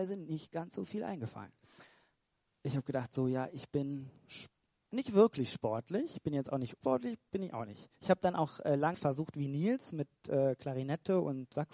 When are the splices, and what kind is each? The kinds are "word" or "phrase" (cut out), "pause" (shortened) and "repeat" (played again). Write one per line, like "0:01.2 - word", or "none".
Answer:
0:06.8 - phrase
0:08.0 - pause
0:08.9 - phrase